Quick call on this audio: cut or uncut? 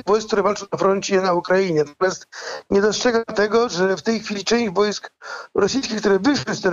uncut